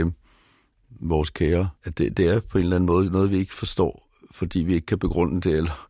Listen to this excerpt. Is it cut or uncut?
cut